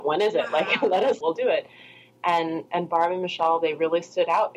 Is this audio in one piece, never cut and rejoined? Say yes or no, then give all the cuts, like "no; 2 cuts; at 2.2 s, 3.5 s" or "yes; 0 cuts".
no; 1 cut; at 1.2 s